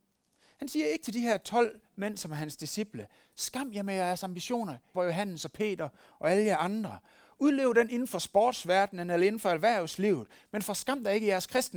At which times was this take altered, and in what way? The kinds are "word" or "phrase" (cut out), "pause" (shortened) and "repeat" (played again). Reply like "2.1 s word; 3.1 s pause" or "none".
4.9 s word